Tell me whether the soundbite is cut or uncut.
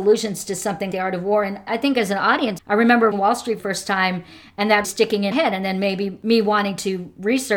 cut